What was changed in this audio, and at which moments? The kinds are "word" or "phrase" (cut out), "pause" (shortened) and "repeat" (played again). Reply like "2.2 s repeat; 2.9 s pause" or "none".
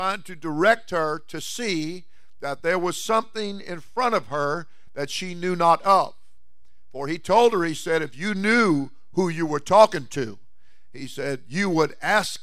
none